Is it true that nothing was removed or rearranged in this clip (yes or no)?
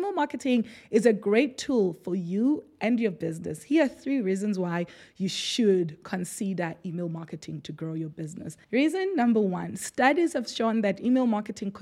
no